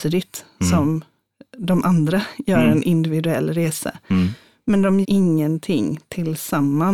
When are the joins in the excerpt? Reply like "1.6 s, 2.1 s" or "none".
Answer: 5.0 s